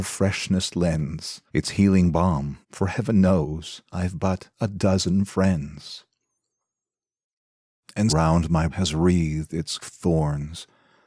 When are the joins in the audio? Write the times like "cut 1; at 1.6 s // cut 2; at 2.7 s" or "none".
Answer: cut 1; at 1.5 s // cut 2; at 2.6 s // cut 3; at 3.9 s // cut 4; at 4.5 s // cut 5; at 8.1 s // cut 6; at 8.7 s // cut 7; at 9.8 s